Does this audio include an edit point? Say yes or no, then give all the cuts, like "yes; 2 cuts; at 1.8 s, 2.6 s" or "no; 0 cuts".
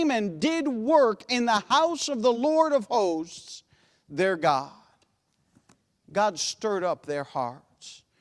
no; 0 cuts